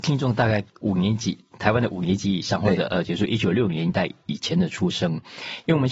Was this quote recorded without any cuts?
yes; 0 cuts

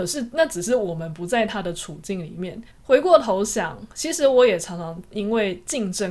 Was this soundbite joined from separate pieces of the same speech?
yes; 1 cut; at 2.7 s

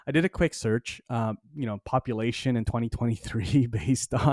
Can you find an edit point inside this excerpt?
no; 0 cuts

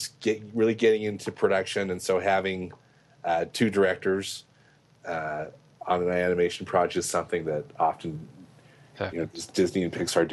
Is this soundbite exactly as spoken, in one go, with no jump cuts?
yes; 0 cuts

